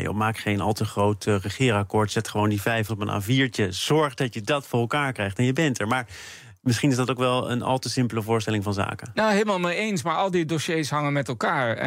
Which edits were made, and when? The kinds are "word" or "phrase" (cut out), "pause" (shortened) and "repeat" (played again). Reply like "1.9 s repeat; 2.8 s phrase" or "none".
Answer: 2.9 s word